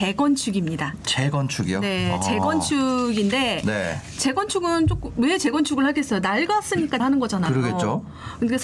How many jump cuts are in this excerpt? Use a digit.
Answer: 1